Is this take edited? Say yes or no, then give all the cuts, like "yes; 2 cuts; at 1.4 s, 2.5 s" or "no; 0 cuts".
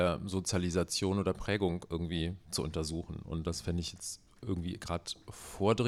no; 0 cuts